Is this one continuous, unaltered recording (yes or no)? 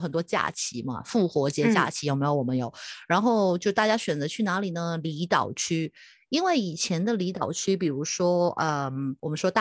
yes